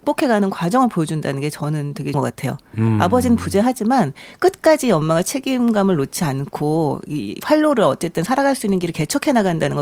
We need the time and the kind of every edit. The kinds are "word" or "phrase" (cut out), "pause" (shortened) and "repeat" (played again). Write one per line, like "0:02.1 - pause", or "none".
0:02.1 - word